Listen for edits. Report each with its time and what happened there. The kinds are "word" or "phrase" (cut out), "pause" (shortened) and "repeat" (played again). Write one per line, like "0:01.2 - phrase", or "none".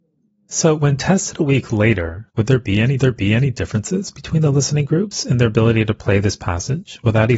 0:02.3 - pause
0:03.0 - repeat